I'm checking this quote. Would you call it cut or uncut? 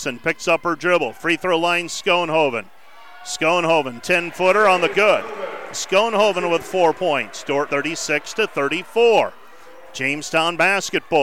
cut